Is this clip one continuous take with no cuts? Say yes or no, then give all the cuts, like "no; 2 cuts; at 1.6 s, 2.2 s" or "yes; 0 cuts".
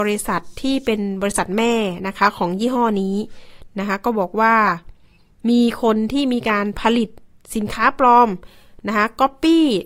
yes; 0 cuts